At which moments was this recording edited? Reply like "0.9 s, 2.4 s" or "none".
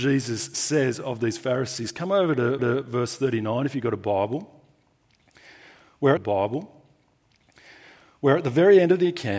2.6 s, 6.2 s